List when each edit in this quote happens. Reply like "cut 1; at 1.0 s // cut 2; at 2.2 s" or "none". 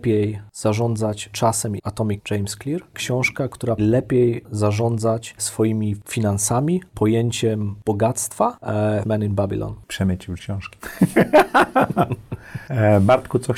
cut 1; at 1.3 s // cut 2; at 1.8 s // cut 3; at 2.2 s // cut 4; at 2.9 s // cut 5; at 3.8 s // cut 6; at 5.4 s // cut 7; at 6.9 s // cut 8; at 9.0 s // cut 9; at 10.4 s